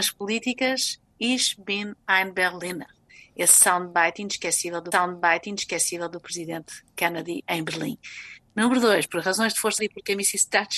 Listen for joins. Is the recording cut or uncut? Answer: cut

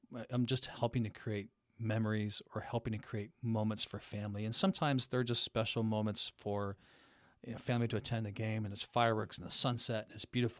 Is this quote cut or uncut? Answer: uncut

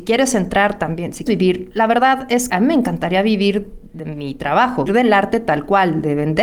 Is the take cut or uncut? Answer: cut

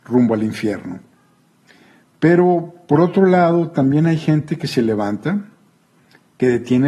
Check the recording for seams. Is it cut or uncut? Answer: uncut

